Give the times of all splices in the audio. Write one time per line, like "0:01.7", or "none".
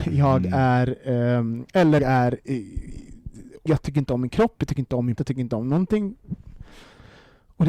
0:02.0
0:03.7
0:05.2